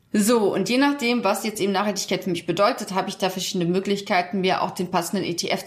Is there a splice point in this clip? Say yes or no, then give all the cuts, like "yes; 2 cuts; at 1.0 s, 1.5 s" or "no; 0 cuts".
no; 0 cuts